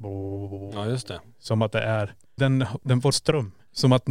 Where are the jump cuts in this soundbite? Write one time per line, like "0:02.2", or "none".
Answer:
0:02.4
0:03.1